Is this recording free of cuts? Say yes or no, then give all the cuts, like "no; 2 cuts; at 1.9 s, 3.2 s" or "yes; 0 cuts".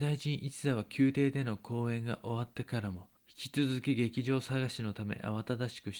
no; 1 cut; at 3.2 s